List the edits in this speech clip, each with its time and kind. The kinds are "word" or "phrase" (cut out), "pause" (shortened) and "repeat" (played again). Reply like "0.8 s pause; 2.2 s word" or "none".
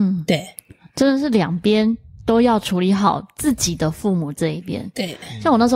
none